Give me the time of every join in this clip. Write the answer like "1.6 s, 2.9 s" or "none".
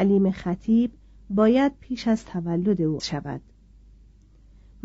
3.0 s

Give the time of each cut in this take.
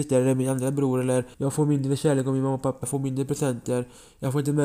1.3 s, 2.8 s

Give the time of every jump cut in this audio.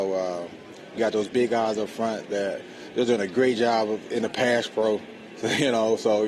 1.0 s

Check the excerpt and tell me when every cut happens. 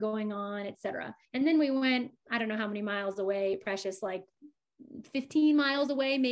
1.2 s

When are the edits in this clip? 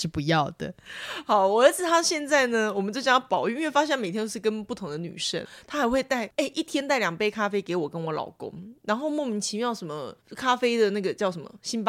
10.2 s

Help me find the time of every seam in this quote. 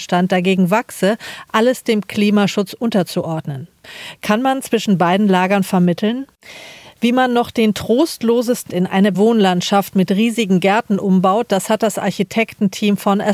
8.7 s, 9.1 s

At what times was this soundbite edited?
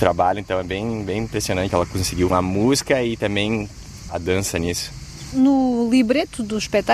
1.7 s, 2.3 s, 4.1 s

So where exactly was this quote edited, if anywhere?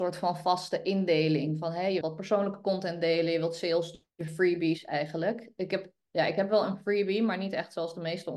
2.0 s

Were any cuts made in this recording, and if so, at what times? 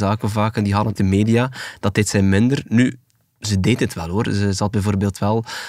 1.0 s

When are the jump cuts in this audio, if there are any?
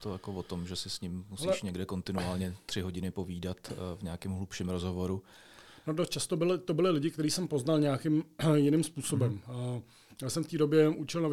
none

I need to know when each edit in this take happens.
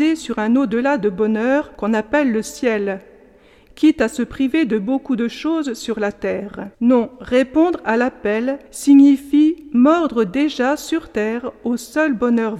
1.7 s, 6.7 s, 8.7 s

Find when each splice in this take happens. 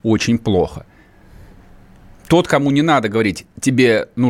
none

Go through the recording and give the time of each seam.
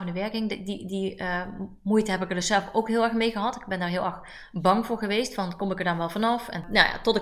none

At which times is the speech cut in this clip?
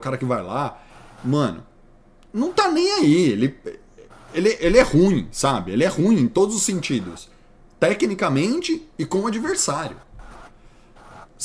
none

